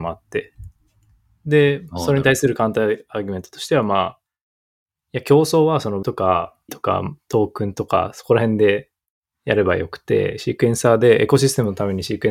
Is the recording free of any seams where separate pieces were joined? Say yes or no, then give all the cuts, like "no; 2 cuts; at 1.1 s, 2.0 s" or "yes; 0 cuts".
no; 2 cuts; at 6.0 s, 6.7 s